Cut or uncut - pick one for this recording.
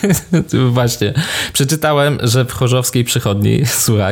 uncut